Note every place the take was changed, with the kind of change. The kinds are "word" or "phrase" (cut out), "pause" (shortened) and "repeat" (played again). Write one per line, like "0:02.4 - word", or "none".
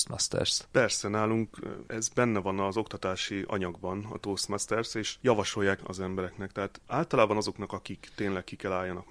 0:05.8 - word

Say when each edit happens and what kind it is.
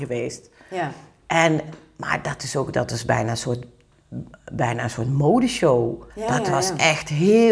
0:06.1 - pause

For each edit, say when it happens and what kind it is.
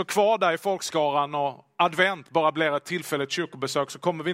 none

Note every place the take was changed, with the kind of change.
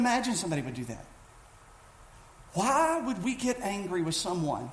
none

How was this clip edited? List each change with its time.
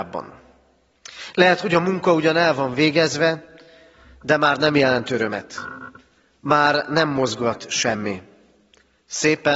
none

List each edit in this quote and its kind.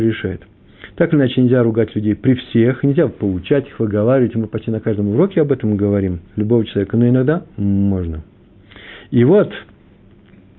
0:06.3 - pause

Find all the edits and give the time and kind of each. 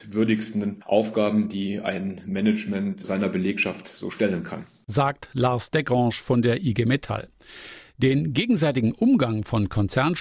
none

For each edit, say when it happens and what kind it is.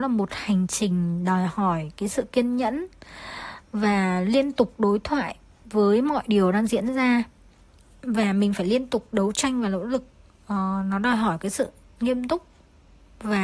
none

